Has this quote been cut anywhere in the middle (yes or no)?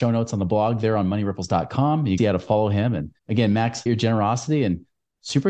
yes